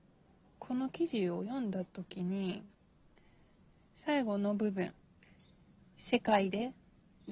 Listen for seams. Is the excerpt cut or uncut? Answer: cut